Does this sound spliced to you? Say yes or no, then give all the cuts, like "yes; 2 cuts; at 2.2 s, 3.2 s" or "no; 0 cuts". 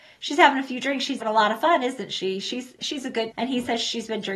yes; 3 cuts; at 1.2 s, 2.8 s, 3.3 s